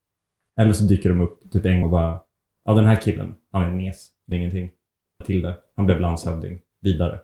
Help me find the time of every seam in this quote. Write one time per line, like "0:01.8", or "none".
0:01.8
0:02.5
0:04.3
0:05.2